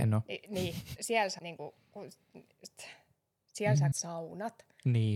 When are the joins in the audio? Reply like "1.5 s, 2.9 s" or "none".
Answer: 1.0 s, 1.4 s, 3.9 s